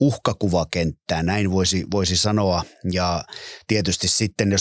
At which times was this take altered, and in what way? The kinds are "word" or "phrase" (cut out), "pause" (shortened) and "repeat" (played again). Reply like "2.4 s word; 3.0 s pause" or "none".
none